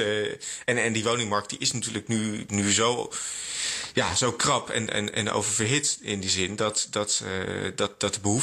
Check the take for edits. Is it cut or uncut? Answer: cut